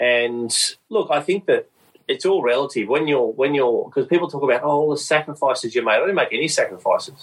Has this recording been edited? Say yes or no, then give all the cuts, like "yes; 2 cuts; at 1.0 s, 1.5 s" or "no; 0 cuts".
no; 0 cuts